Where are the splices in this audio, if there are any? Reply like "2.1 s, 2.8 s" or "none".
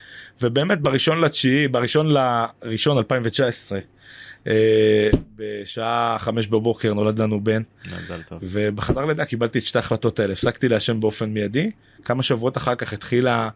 none